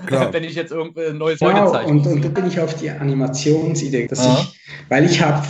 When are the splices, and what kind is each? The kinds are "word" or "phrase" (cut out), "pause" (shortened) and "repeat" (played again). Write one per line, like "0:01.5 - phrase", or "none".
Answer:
0:01.4 - word
0:02.4 - word
0:04.1 - word

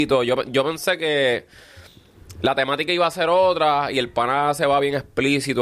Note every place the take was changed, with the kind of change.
none

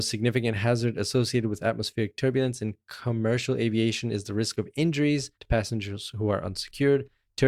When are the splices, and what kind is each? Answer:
0:05.3 - pause

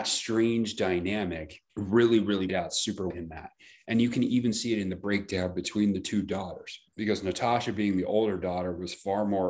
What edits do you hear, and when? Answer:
0:01.7 - pause
0:02.5 - word
0:03.1 - word
0:06.9 - pause

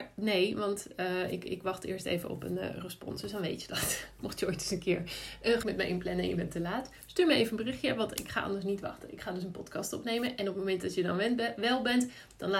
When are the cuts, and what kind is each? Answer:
0:05.6 - word

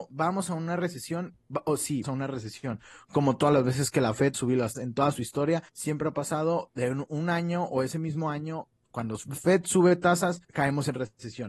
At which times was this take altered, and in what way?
0:02.0 - word
0:04.3 - word
0:04.7 - word
0:05.7 - pause
0:10.4 - pause

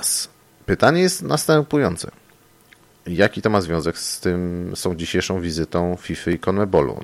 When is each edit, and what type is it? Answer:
none

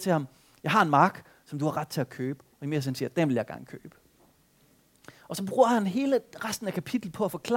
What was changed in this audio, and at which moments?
0:02.5 - pause

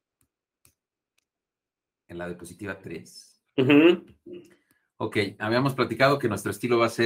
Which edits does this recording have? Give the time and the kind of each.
0:03.5 - pause

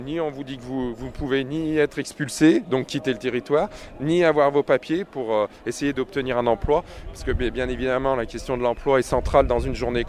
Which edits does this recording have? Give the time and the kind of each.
none

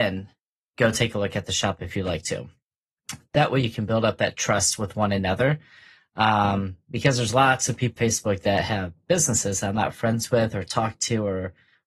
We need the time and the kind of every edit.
0:08.0 - word

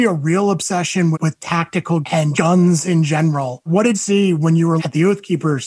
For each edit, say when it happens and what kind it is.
0:01.1 - word
0:02.0 - word
0:02.3 - word
0:03.9 - word
0:04.8 - word

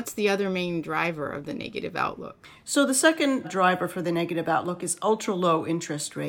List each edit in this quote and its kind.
0:03.4 - word

